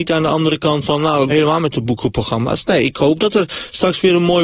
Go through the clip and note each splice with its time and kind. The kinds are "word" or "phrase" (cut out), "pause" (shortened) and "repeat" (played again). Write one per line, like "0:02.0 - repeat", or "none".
0:01.3 - phrase